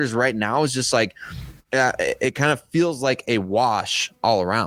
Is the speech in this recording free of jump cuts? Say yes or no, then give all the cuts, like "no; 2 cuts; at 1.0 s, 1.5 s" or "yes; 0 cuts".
yes; 0 cuts